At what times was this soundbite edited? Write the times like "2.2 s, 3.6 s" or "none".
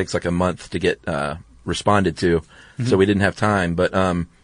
none